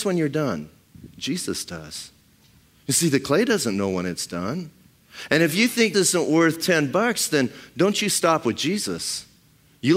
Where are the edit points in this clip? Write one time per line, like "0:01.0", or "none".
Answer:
0:05.9